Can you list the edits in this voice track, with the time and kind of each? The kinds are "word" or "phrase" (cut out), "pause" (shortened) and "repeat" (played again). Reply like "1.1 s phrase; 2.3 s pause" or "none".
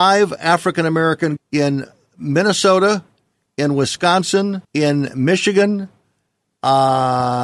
1.4 s word; 4.6 s pause